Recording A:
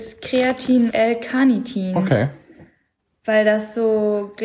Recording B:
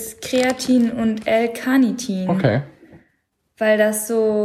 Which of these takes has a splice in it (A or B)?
A